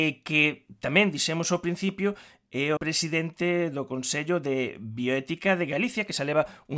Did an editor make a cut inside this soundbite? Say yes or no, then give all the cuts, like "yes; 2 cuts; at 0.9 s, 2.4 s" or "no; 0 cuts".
yes; 1 cut; at 2.8 s